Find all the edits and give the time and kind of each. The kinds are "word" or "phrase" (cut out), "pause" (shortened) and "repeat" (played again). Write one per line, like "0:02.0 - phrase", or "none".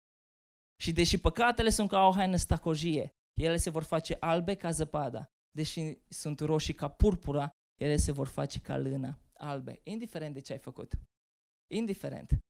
none